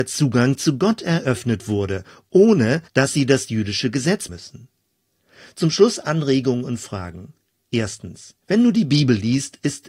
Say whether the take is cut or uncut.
cut